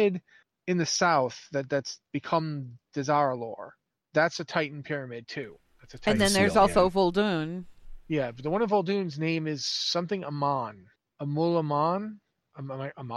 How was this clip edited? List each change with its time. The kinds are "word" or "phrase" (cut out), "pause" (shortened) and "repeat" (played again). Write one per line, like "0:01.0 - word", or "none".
none